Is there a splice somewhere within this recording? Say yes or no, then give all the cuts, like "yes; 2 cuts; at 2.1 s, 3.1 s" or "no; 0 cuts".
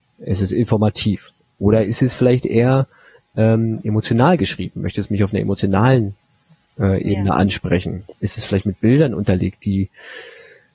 no; 0 cuts